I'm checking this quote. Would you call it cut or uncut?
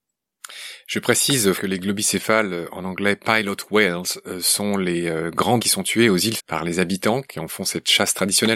cut